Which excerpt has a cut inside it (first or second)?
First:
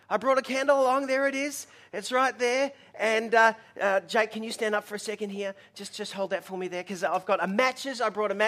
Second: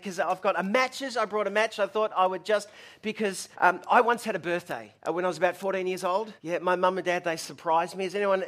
second